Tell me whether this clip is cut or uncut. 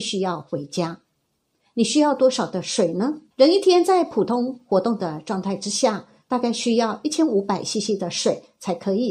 cut